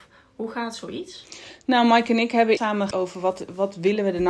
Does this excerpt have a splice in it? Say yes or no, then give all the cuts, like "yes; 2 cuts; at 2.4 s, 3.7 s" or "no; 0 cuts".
yes; 2 cuts; at 2.6 s, 2.9 s